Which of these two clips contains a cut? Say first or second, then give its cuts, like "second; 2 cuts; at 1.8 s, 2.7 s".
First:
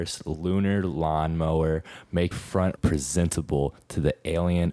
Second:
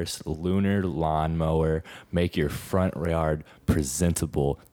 first; 2 cuts; at 2.3 s, 2.8 s